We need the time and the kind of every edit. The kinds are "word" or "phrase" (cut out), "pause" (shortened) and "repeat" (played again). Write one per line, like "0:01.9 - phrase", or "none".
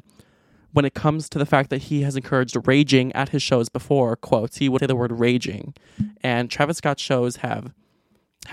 0:04.8 - word